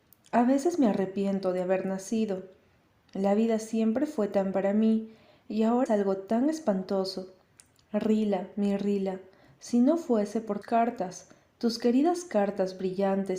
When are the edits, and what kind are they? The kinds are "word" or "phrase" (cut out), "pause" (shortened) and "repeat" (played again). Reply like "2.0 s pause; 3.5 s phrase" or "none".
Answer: 4.5 s word; 5.9 s word; 10.6 s word